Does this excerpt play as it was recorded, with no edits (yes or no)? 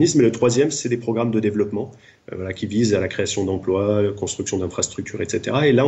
yes